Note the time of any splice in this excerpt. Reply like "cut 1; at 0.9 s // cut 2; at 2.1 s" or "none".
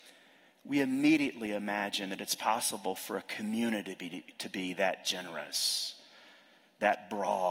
none